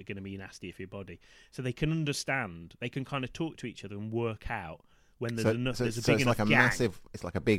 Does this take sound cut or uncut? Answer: uncut